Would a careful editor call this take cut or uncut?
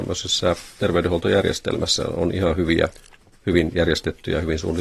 uncut